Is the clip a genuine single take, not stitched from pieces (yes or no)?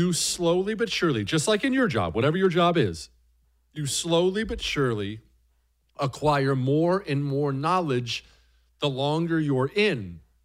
yes